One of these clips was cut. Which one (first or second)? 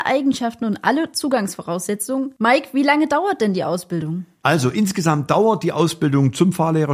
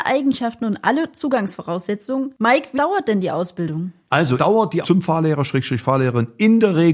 second